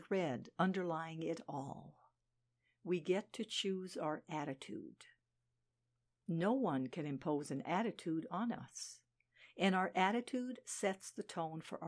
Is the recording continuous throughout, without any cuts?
yes; 0 cuts

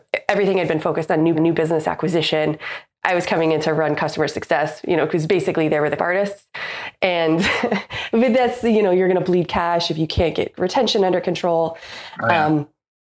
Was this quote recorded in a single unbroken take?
no; 2 cuts; at 1.3 s, 6.0 s

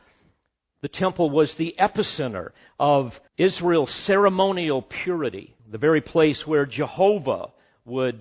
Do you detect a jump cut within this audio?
yes; 2 cuts; at 3.3 s, 5.6 s

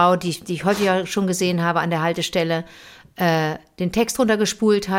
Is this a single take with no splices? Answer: yes; 0 cuts

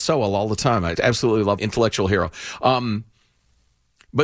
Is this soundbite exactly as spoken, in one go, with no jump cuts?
no; 2 cuts; at 1.0 s, 1.6 s

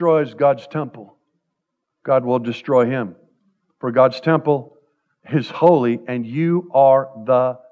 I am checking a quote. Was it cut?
no; 0 cuts

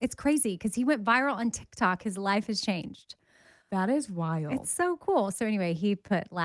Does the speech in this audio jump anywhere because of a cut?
no; 0 cuts

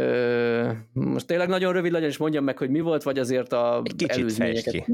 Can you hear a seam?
no; 0 cuts

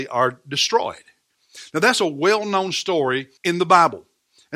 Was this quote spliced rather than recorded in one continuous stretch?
yes; 1 cut; at 3.4 s

